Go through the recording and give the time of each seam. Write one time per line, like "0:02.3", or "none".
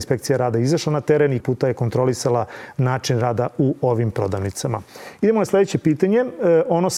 0:01.4